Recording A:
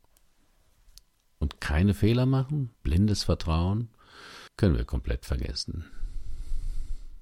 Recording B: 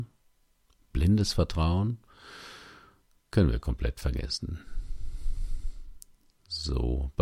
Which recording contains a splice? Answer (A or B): A